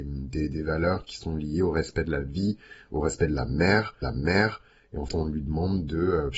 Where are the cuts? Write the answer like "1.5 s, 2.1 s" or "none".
4.0 s, 5.1 s